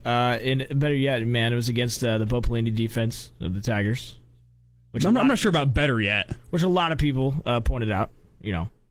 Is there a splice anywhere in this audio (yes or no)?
no